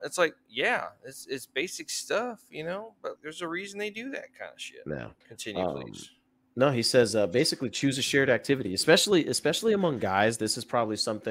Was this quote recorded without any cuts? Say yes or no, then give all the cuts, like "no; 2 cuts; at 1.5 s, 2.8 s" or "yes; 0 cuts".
no; 2 cuts; at 3.2 s, 5.2 s